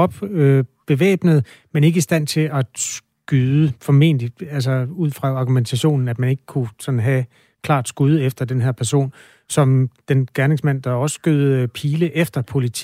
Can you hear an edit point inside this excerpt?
no; 0 cuts

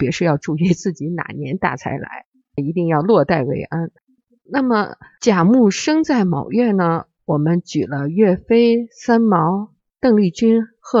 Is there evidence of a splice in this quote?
no; 0 cuts

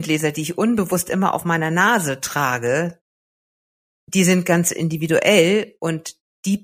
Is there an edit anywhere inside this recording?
no; 0 cuts

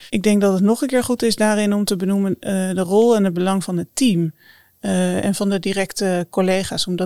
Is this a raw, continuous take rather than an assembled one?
yes; 0 cuts

